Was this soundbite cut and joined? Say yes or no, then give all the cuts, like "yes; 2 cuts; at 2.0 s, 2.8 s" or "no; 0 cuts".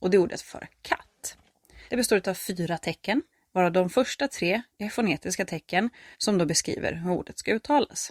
yes; 3 cuts; at 1.9 s, 3.3 s, 6.1 s